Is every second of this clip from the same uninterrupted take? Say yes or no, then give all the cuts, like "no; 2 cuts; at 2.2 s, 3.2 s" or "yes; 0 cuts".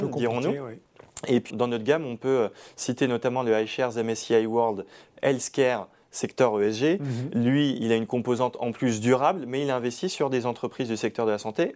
no; 1 cut; at 1.5 s